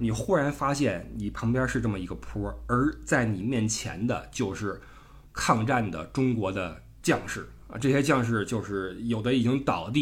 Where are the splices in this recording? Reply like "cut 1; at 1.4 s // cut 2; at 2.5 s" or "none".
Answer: cut 1; at 5.3 s